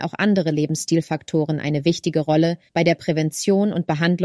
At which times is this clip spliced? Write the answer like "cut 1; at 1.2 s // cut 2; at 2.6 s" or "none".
cut 1; at 2.7 s